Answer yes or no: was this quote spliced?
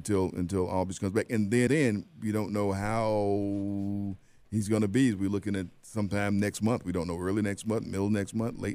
yes